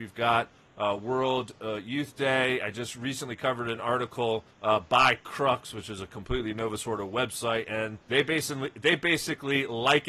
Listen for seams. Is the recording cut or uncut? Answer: cut